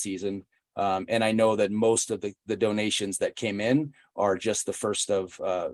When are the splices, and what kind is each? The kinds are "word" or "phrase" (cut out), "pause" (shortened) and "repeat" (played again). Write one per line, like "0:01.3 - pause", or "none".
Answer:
none

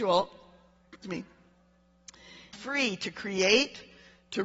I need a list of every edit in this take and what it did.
0:01.0 - word
0:02.5 - word

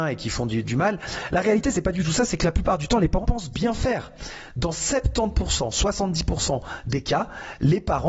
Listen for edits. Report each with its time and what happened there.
0:03.2 - word

